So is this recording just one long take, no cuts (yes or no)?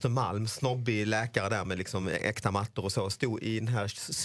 yes